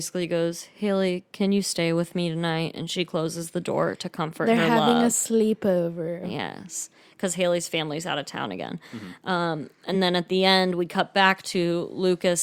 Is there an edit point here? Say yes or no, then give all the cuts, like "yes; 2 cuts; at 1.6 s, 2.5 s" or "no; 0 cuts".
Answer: no; 0 cuts